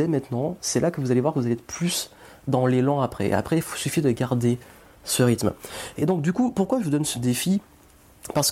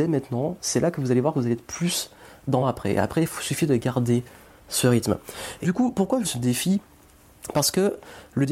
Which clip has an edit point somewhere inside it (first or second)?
second